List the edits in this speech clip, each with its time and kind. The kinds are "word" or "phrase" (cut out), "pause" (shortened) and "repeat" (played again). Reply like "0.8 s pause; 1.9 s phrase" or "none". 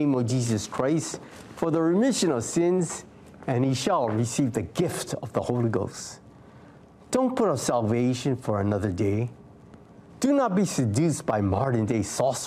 none